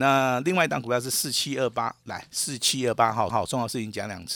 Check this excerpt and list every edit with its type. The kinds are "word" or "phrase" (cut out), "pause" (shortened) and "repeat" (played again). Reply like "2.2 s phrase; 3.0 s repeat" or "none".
3.3 s repeat